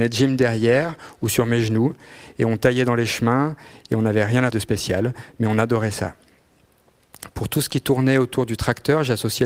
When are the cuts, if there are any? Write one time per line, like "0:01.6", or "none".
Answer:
0:04.5